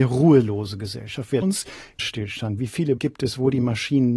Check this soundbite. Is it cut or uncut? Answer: cut